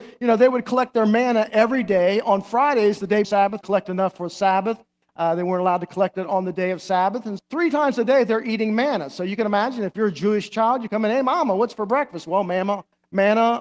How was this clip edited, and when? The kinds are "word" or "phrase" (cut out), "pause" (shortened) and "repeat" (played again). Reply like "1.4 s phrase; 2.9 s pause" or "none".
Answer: 3.2 s word; 3.6 s phrase; 7.4 s word